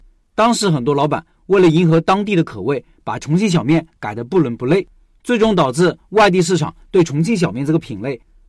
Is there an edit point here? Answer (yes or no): no